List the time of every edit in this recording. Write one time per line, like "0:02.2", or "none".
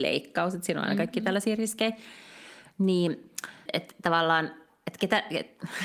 0:03.7